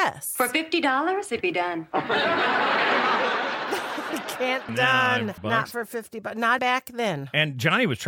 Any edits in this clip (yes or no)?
yes